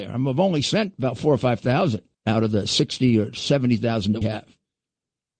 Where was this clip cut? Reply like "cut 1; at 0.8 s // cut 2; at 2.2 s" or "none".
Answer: cut 1; at 2.1 s // cut 2; at 4.2 s